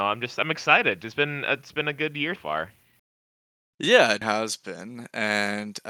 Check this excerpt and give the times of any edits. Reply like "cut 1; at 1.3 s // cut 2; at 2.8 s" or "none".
cut 1; at 2.4 s // cut 2; at 4.2 s